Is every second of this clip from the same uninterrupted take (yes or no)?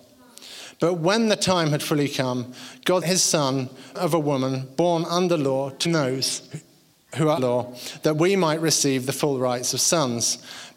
no